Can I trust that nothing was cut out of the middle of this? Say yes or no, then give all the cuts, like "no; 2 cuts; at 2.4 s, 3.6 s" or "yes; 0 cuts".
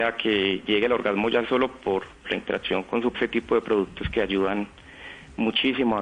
no; 3 cuts; at 1.4 s, 2.2 s, 3.1 s